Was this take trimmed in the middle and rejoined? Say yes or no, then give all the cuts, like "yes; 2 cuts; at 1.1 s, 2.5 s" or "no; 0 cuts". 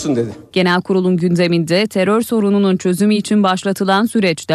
no; 0 cuts